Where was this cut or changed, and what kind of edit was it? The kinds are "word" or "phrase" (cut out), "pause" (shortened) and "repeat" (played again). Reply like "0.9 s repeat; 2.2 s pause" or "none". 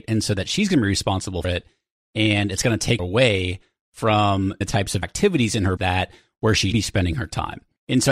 1.4 s word; 3.0 s word; 4.6 s word; 5.0 s word; 5.8 s word; 6.7 s word